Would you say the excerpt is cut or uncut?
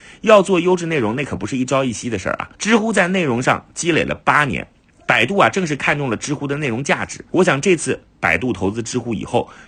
cut